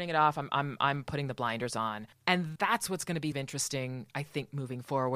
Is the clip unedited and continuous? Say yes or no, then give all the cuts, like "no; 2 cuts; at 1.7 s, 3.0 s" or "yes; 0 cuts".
no; 2 cuts; at 2.6 s, 3.3 s